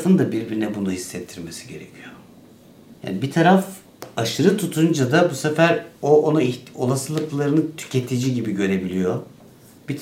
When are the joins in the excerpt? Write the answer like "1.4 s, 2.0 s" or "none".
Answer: 3.0 s, 5.9 s